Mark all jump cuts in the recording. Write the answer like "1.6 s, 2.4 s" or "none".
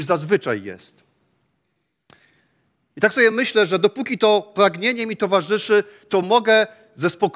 none